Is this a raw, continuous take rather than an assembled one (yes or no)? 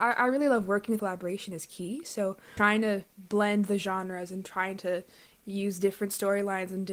no